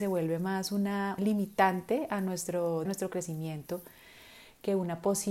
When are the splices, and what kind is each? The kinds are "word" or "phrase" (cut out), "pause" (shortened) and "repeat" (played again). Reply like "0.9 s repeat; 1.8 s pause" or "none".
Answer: 1.2 s word; 2.8 s phrase